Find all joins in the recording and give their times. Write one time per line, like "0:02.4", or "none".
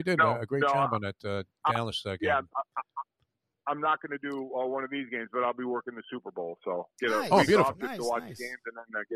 none